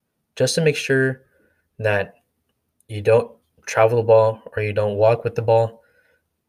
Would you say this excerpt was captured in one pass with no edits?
yes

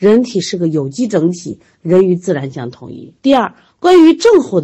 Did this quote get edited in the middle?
yes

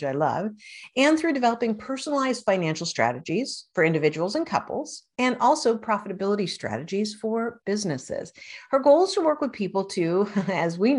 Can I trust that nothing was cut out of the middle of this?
yes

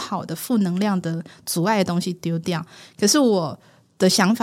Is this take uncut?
yes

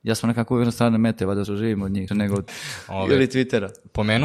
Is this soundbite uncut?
no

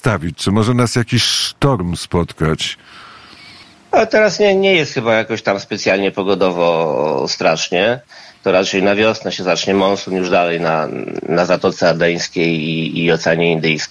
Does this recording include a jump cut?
no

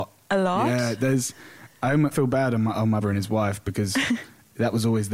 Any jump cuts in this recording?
yes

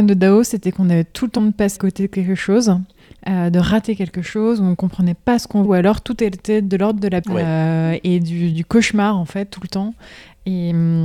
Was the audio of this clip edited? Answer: yes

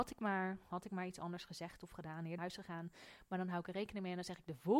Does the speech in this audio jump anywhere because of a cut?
yes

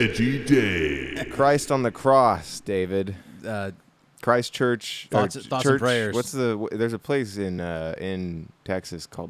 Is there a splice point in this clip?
no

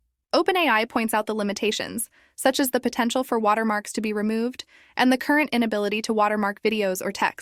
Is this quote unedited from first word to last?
yes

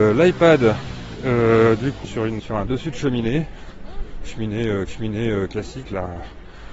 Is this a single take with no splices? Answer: no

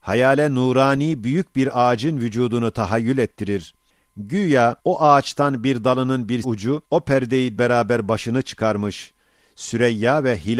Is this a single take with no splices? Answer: no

